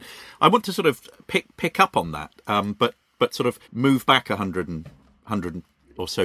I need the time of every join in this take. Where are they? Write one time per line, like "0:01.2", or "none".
0:03.6